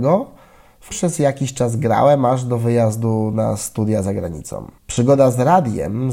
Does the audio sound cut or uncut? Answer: cut